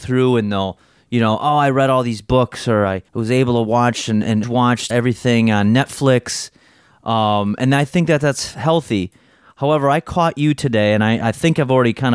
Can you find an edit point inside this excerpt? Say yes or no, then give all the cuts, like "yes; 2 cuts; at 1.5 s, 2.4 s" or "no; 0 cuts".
yes; 3 cuts; at 3.1 s, 4.4 s, 4.9 s